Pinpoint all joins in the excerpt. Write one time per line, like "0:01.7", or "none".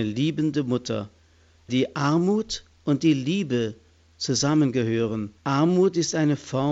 0:01.7
0:02.7
0:05.4